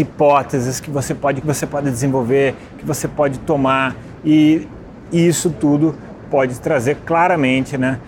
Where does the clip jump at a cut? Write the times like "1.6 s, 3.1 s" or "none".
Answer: 1.4 s